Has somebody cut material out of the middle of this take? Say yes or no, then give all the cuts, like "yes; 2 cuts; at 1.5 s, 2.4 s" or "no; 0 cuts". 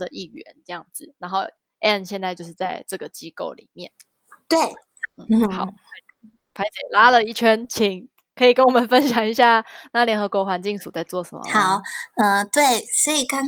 no; 0 cuts